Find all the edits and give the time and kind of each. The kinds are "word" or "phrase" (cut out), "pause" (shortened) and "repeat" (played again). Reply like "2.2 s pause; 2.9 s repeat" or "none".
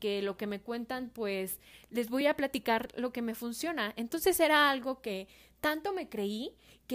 none